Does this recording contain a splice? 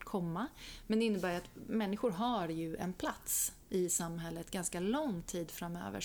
no; 0 cuts

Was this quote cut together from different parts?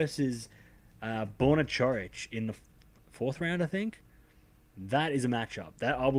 no; 0 cuts

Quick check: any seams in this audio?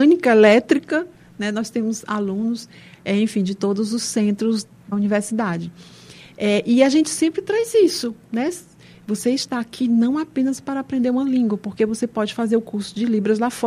yes; 1 cut; at 4.9 s

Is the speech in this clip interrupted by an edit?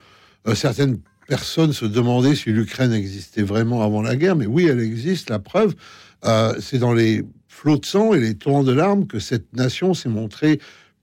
no; 0 cuts

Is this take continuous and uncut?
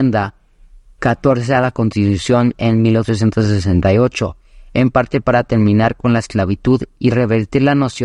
yes; 0 cuts

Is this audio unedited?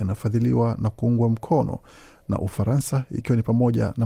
yes; 0 cuts

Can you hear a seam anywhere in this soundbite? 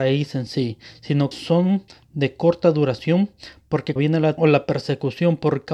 yes; 4 cuts; at 1.3 s, 1.9 s, 4.0 s, 4.4 s

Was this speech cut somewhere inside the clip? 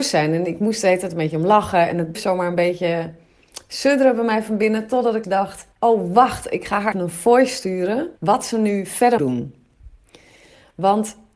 yes; 6 cuts; at 2.1 s, 5.2 s, 5.7 s, 6.9 s, 8.2 s, 9.2 s

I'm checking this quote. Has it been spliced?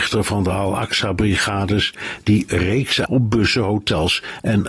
yes; 1 cut; at 3.1 s

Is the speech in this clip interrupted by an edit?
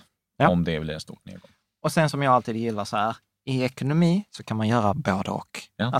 no; 0 cuts

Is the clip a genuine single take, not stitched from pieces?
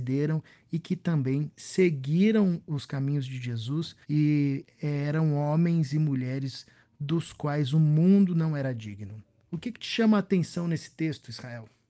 no; 1 cut; at 4.0 s

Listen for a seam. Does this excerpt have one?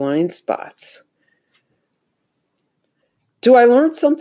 no; 0 cuts

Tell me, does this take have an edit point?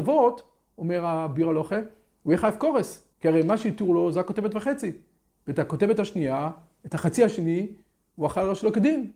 yes; 1 cut; at 3.1 s

